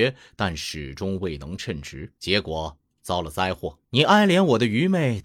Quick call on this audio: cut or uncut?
cut